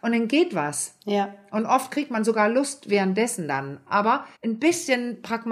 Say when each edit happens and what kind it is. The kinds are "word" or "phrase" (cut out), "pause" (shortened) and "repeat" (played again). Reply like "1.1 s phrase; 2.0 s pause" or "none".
4.4 s pause